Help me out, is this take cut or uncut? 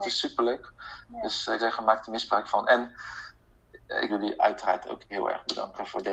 cut